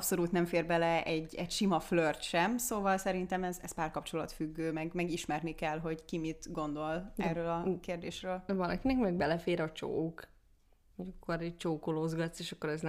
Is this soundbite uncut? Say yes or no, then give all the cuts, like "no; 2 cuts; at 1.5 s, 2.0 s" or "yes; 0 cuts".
yes; 0 cuts